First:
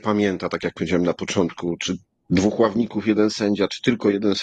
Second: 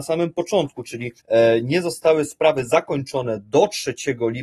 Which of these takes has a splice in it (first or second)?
second